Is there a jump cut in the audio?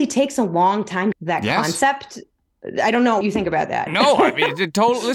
yes; 2 cuts; at 1.1 s, 3.2 s

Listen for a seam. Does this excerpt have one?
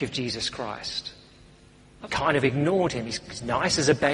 yes; 1 cut; at 2.1 s

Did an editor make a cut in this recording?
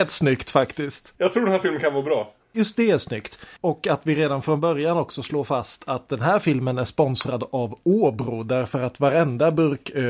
yes; 2 cuts; at 1.2 s, 2.4 s

